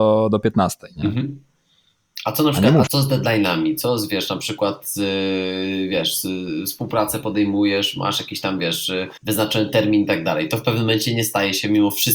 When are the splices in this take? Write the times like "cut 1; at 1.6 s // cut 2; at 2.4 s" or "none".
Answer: cut 1; at 2.9 s // cut 2; at 9.2 s